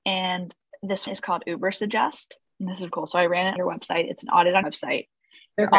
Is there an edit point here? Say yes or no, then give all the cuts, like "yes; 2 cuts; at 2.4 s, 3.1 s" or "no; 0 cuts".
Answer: yes; 4 cuts; at 1.1 s, 2.9 s, 3.6 s, 4.6 s